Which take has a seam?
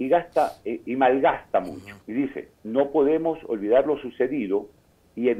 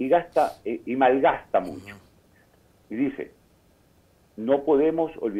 first; 2 cuts; at 2.0 s, 2.5 s

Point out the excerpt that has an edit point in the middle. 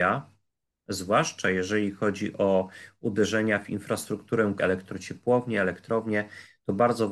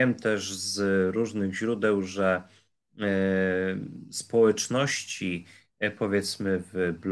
first; 1 cut; at 4.6 s

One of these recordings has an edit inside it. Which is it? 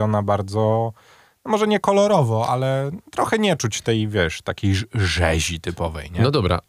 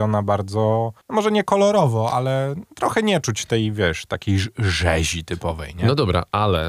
second; 1 cut; at 1.0 s

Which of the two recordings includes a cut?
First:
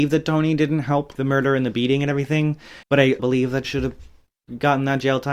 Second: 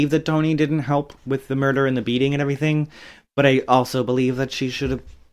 first; 4 cuts; at 1.2 s, 2.8 s, 3.2 s, 3.6 s

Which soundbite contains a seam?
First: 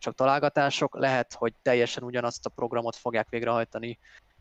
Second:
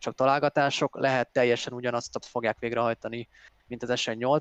second; 2 cuts; at 1.3 s, 2.2 s

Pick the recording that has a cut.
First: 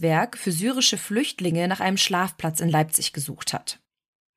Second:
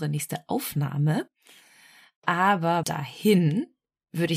second; 1 cut; at 2.8 s

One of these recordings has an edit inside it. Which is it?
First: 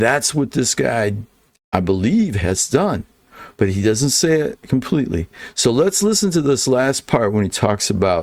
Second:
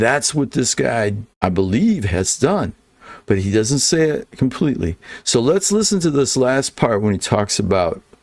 second; 1 cut; at 1.3 s

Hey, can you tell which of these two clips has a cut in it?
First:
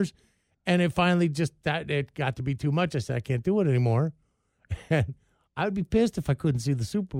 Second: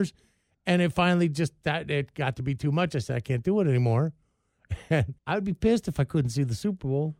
second; 1 cut; at 5.2 s

